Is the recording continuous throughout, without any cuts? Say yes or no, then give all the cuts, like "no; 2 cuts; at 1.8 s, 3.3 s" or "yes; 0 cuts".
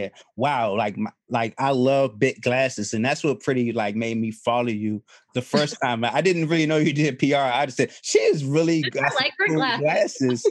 yes; 0 cuts